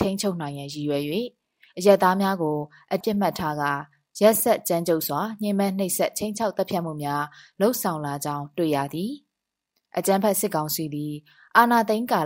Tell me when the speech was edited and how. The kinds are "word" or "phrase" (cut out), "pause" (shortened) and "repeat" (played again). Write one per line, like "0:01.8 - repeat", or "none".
0:03.0 - word